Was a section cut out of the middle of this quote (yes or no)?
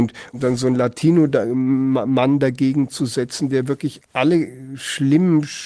yes